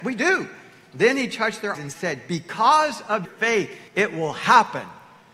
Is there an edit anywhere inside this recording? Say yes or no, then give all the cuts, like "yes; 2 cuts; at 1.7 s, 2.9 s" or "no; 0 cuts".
yes; 3 cuts; at 1.7 s, 3.2 s, 3.9 s